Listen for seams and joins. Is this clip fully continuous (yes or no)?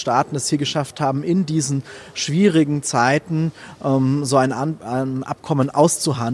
yes